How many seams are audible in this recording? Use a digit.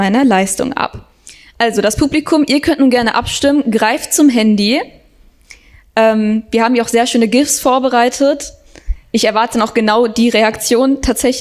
0